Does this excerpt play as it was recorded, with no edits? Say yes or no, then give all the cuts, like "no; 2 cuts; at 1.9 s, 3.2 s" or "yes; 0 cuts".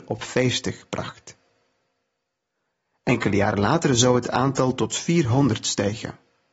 yes; 0 cuts